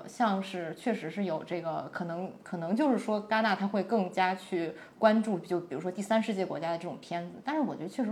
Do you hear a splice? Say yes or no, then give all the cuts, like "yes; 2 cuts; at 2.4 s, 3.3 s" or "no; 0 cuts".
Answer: no; 0 cuts